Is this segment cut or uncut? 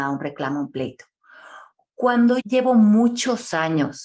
cut